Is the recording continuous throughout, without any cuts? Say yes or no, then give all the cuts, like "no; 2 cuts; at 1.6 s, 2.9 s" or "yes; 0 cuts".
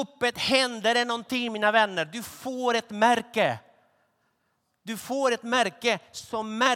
yes; 0 cuts